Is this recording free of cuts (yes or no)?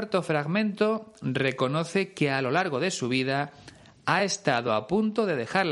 yes